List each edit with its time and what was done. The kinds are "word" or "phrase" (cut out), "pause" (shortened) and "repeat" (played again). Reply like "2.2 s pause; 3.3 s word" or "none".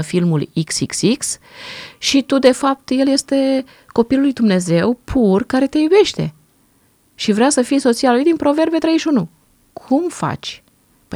none